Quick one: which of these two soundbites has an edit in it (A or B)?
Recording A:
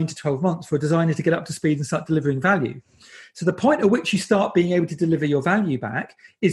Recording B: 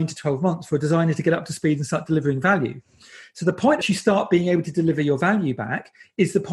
B